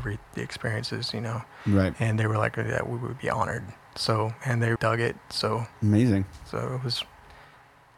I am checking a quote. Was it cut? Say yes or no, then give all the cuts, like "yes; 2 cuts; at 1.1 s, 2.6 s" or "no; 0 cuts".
yes; 1 cut; at 4.8 s